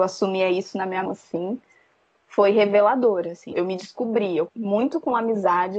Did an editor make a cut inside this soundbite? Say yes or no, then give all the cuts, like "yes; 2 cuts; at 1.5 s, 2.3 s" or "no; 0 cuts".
yes; 3 cuts; at 1.1 s, 3.5 s, 4.5 s